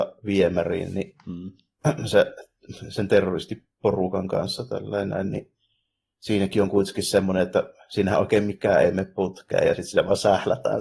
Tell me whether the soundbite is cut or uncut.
uncut